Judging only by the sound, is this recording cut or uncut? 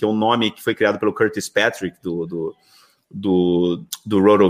uncut